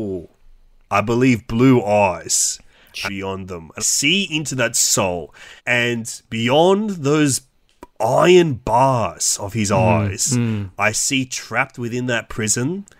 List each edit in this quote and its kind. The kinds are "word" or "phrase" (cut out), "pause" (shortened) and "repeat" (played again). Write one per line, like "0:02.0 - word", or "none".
0:03.0 - phrase
0:03.8 - word
0:05.6 - pause